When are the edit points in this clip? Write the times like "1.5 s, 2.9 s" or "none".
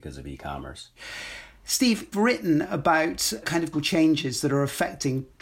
2.1 s, 3.4 s, 3.7 s

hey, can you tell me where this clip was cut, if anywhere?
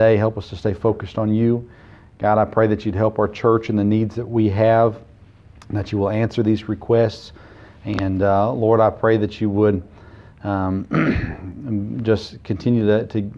none

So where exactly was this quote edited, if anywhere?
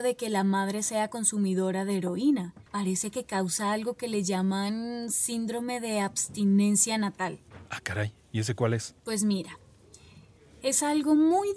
2.7 s, 9.0 s

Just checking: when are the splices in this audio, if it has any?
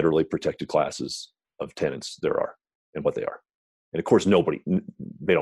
none

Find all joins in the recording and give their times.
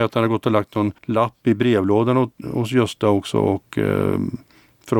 1.0 s

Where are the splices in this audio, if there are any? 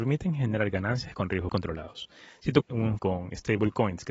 1.5 s, 2.6 s, 3.0 s

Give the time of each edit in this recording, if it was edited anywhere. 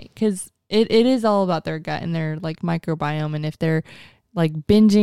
none

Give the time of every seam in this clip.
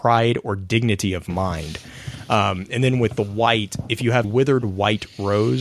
4.2 s

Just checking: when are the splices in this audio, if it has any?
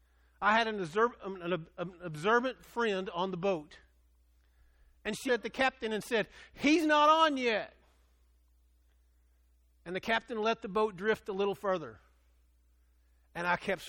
5.3 s

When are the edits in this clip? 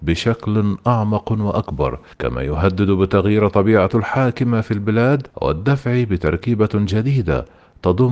2.1 s, 3.9 s, 5.3 s

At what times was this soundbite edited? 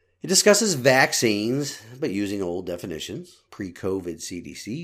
3.5 s

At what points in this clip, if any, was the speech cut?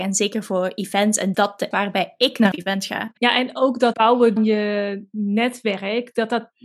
1.3 s, 1.7 s, 2.5 s, 3.2 s, 3.9 s, 4.4 s

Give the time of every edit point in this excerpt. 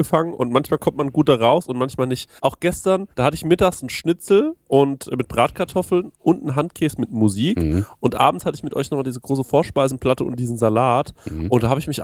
2.4 s, 3.1 s, 4.6 s

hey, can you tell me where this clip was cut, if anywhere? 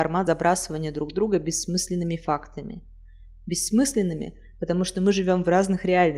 none

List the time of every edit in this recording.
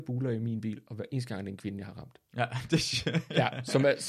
none

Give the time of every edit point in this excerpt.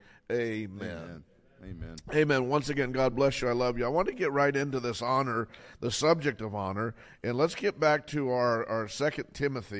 none

